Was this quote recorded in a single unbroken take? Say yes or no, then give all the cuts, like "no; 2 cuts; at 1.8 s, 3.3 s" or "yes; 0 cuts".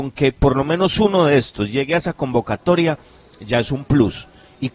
yes; 0 cuts